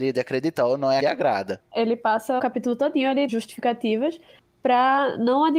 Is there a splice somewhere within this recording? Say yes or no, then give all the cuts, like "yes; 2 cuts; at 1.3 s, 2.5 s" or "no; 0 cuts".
yes; 3 cuts; at 1.0 s, 2.4 s, 3.3 s